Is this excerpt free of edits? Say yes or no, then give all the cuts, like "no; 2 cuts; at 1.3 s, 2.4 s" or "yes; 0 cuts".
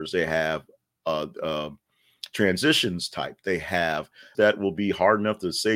no; 1 cut; at 4.3 s